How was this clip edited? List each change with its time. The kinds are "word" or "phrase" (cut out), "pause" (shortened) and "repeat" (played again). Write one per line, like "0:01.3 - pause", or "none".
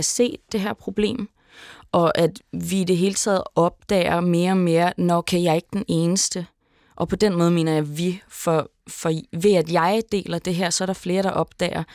none